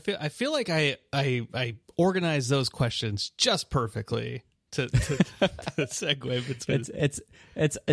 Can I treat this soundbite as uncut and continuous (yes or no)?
yes